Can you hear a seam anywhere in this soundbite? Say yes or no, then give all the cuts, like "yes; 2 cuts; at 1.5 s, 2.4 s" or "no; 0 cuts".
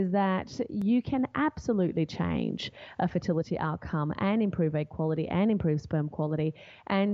no; 0 cuts